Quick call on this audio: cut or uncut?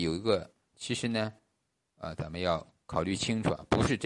uncut